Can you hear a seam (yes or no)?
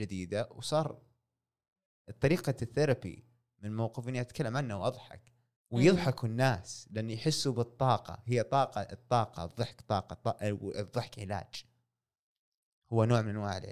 yes